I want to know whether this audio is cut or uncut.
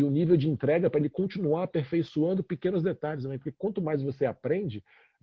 uncut